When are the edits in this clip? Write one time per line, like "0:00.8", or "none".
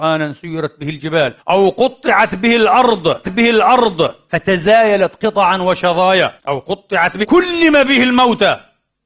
0:01.4
0:03.2
0:06.4
0:07.2